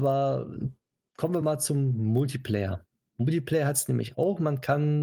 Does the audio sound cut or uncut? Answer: uncut